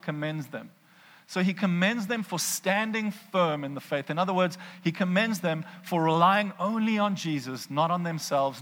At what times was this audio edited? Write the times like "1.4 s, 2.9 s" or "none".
none